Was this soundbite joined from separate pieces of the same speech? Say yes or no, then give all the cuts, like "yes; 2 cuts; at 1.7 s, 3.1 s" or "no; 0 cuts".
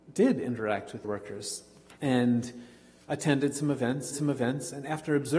yes; 3 cuts; at 1.0 s, 2.0 s, 4.1 s